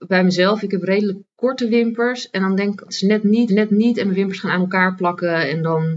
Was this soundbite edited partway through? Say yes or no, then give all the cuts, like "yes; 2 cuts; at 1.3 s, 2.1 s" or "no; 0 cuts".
yes; 2 cuts; at 2.8 s, 3.5 s